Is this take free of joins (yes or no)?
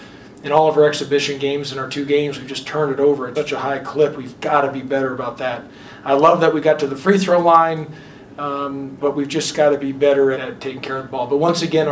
no